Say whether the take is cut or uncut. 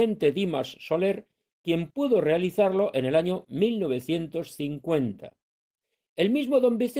uncut